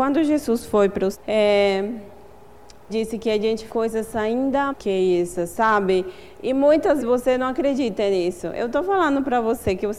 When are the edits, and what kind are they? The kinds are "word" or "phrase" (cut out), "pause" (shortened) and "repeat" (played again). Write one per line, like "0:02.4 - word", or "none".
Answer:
0:01.1 - word
0:02.9 - word
0:03.7 - word
0:04.7 - word
0:07.0 - word